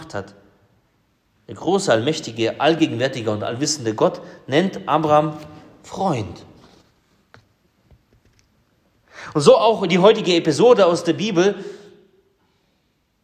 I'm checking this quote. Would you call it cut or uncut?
uncut